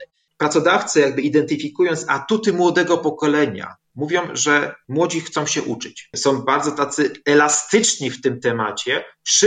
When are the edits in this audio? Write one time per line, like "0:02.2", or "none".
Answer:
none